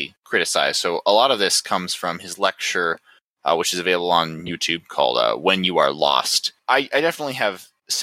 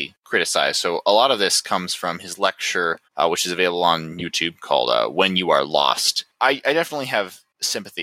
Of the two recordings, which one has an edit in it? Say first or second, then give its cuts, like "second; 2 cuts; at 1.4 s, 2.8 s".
second; 1 cut; at 3.0 s